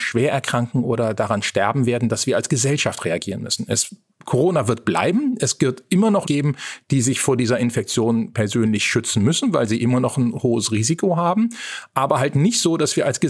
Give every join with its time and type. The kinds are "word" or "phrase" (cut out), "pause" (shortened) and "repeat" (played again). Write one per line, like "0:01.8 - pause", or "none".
0:06.2 - word